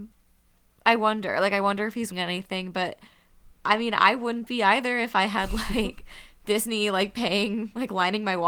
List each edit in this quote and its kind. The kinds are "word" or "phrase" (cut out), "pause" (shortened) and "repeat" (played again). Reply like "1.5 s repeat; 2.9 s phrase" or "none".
2.1 s word